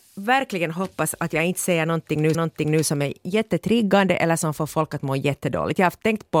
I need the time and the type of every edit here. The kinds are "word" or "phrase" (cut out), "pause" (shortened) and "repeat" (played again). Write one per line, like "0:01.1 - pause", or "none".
0:02.3 - repeat